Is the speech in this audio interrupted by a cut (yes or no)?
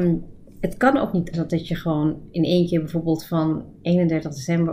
yes